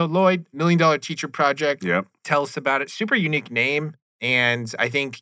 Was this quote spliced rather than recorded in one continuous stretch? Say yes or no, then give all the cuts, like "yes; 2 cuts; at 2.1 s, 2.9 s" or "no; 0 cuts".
yes; 2 cuts; at 2.2 s, 4.0 s